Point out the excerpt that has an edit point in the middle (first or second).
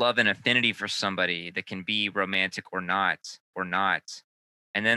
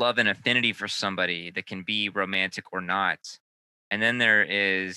first